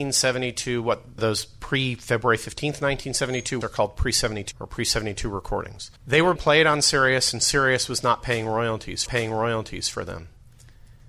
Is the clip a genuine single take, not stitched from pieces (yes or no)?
no